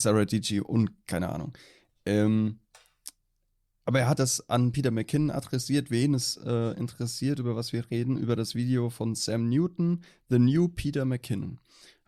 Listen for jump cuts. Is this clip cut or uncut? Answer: cut